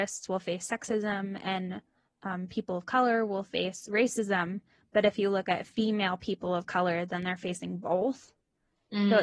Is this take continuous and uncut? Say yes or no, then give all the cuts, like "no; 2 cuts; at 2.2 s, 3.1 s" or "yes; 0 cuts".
yes; 0 cuts